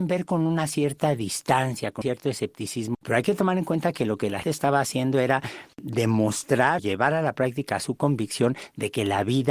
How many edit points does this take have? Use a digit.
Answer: 4